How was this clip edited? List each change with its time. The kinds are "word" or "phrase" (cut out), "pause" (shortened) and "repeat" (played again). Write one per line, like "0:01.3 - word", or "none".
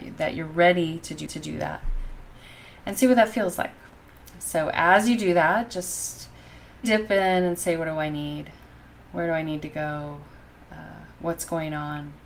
0:01.3 - repeat
0:06.8 - word